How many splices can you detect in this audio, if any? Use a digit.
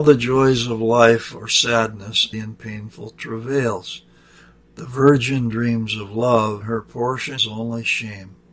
3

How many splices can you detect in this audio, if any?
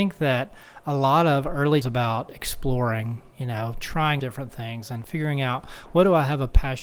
3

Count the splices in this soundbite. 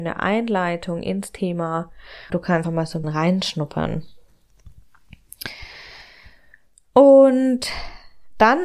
3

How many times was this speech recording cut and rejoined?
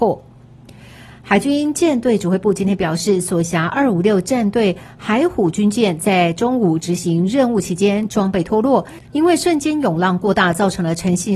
1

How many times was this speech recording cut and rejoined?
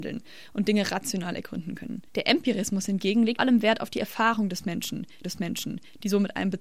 3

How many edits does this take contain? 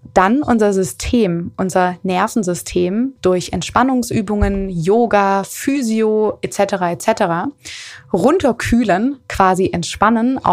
0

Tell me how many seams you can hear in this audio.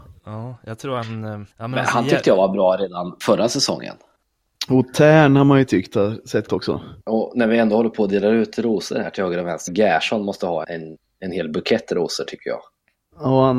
5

